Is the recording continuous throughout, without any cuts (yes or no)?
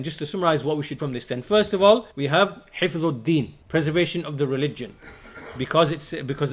no